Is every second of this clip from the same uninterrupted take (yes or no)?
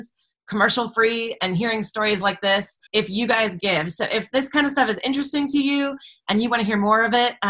no